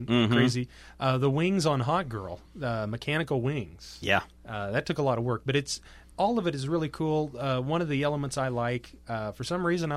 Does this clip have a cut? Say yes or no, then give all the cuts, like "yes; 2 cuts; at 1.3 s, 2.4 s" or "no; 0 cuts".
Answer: no; 0 cuts